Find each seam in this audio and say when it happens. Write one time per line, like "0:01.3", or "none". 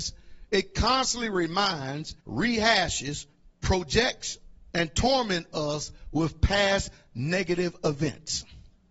0:02.2